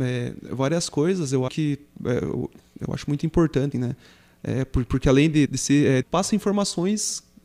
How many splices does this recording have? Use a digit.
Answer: 4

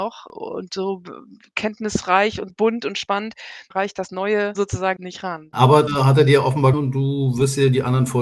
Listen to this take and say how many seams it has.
6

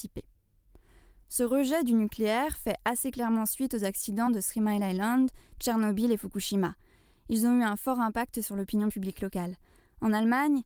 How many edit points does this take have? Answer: 0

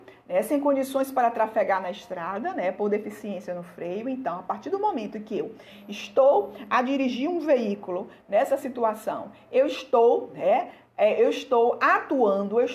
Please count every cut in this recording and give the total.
0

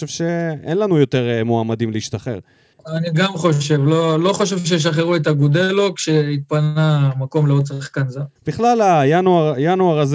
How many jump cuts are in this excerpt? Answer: 2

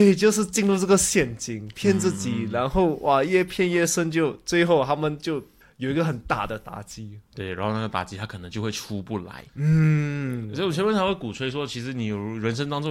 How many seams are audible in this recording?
2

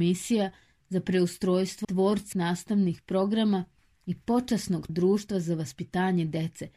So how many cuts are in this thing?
3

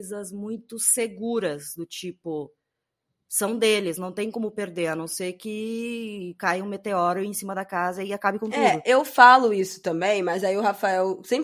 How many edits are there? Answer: 0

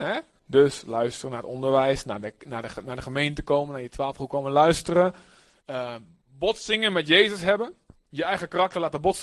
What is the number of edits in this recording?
0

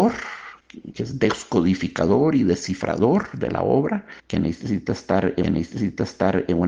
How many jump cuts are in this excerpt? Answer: 2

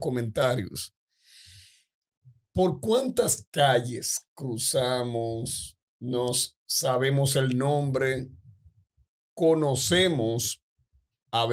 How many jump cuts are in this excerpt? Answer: 0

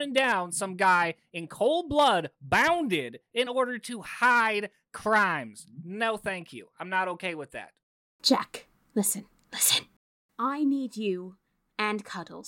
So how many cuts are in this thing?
0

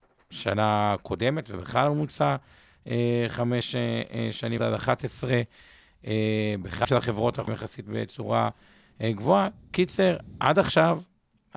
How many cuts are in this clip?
3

